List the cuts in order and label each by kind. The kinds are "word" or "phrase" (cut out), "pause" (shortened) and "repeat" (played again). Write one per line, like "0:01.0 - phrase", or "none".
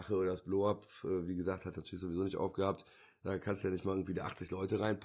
none